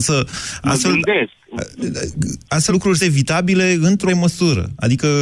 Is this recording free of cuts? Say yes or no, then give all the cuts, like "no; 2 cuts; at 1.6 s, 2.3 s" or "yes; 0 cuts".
no; 3 cuts; at 2.7 s, 3.0 s, 4.1 s